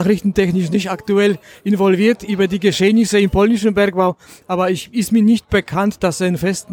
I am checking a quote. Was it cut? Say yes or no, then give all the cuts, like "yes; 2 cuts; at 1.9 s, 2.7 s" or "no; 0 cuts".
no; 0 cuts